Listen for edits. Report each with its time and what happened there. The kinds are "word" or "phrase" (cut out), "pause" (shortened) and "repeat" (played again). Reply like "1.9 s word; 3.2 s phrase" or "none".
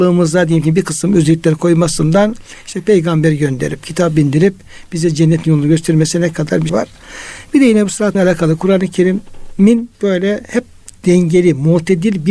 6.7 s word; 8.1 s word; 9.9 s pause